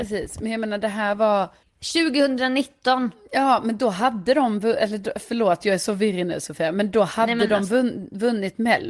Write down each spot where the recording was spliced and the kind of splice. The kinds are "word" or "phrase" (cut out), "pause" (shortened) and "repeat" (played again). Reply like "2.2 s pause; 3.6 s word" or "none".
none